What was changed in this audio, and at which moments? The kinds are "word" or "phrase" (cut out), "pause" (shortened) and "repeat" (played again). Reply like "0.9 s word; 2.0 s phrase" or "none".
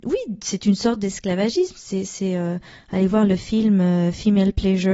none